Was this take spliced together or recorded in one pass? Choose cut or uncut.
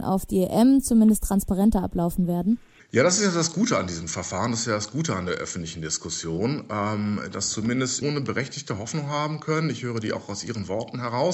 cut